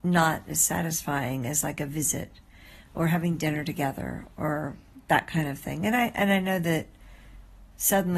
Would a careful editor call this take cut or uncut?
uncut